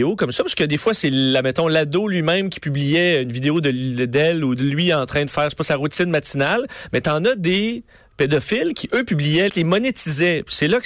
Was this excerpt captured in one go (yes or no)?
no